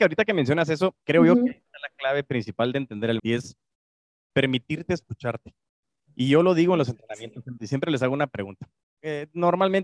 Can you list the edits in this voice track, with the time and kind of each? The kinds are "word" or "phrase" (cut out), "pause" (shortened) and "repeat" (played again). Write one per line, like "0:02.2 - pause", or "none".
0:01.0 - word
0:03.2 - word
0:07.6 - word